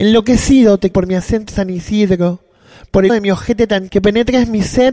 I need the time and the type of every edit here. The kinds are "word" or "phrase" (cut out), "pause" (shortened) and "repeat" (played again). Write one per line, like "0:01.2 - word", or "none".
0:00.9 - word
0:01.5 - word
0:03.1 - word
0:03.9 - word